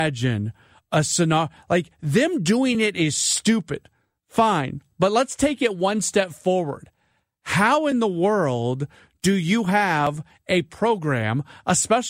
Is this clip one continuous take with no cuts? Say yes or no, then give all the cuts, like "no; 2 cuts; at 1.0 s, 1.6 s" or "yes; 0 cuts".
yes; 0 cuts